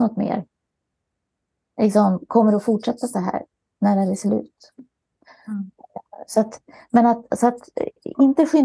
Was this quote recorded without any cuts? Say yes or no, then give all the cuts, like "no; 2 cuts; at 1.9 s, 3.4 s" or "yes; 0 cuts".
yes; 0 cuts